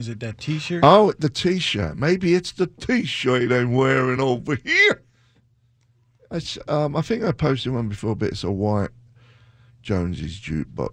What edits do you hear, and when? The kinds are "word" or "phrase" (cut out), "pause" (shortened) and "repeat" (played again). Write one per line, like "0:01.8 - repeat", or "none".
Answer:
none